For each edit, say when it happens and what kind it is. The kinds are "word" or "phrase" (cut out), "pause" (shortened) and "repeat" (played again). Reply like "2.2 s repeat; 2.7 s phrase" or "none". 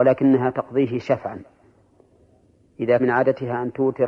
3.0 s word

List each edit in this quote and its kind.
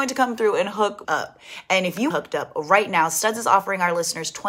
1.0 s word; 2.1 s phrase

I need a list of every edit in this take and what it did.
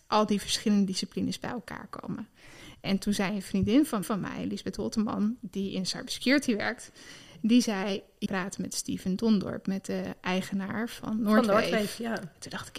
4.0 s repeat; 8.3 s phrase

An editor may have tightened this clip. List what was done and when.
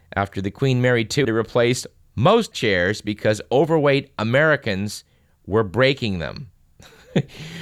1.2 s word; 2.5 s phrase

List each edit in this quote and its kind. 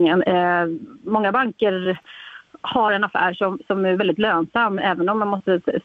none

